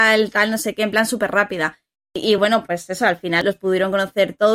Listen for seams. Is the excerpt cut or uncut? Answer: uncut